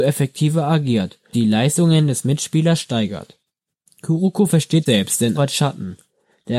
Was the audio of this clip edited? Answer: yes; 3 cuts; at 1.3 s, 4.9 s, 5.3 s

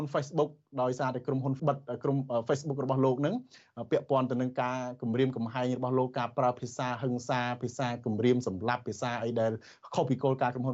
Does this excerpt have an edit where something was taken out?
yes; 1 cut; at 1.6 s

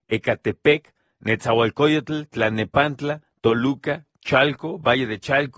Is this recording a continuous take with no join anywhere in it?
yes; 0 cuts

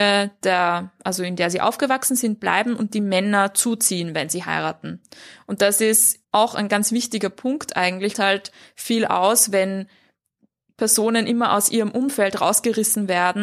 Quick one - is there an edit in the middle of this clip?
yes; 2 cuts; at 6.2 s, 8.1 s

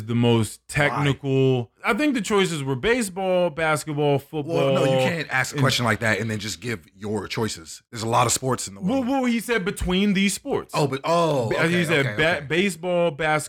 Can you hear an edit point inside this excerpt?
yes; 2 cuts; at 1.8 s, 7.9 s

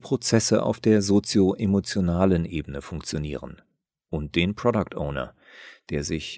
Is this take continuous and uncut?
yes; 0 cuts

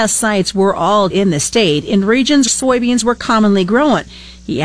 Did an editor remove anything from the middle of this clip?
yes; 2 cuts; at 1.1 s, 2.5 s

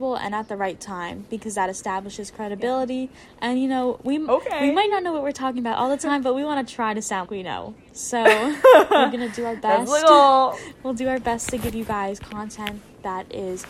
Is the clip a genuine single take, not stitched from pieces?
no; 1 cut; at 7.3 s

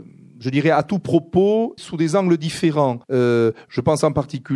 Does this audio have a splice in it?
yes; 2 cuts; at 1.8 s, 3.0 s

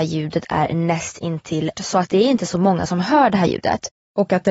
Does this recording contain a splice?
yes; 1 cut; at 1.8 s

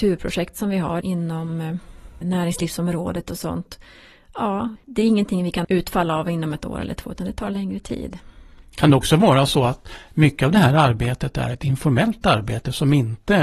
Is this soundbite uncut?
no; 4 cuts; at 1.0 s, 2.2 s, 4.8 s, 5.6 s

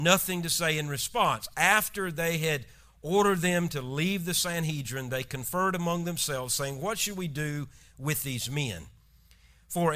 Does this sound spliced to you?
no; 0 cuts

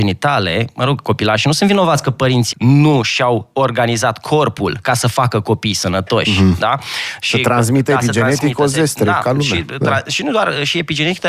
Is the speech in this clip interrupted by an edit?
yes; 1 cut; at 2.5 s

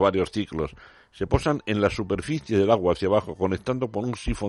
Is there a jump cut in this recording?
no; 0 cuts

